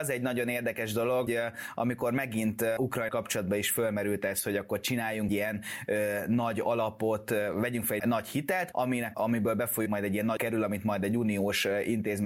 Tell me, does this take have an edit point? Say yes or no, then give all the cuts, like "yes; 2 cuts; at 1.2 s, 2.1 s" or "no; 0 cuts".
yes; 9 cuts; at 1.3 s, 2.8 s, 3.1 s, 5.3 s, 8.0 s, 8.7 s, 9.1 s, 9.9 s, 10.4 s